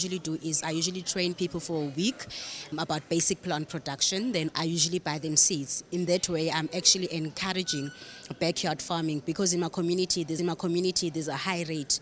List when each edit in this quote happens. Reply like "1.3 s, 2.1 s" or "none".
2.7 s, 4.5 s, 10.4 s